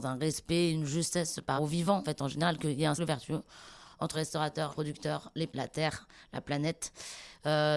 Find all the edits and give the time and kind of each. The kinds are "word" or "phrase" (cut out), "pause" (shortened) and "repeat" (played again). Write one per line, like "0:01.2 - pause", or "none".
0:01.6 - word
0:02.0 - word
0:03.0 - word
0:04.1 - word
0:04.7 - word
0:05.5 - word